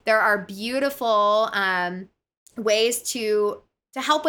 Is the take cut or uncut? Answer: uncut